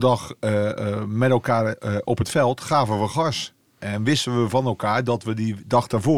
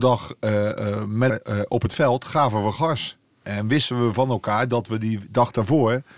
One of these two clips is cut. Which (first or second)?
second